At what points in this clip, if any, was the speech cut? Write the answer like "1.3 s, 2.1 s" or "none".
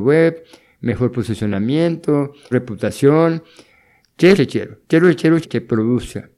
2.5 s, 4.3 s, 4.8 s, 5.4 s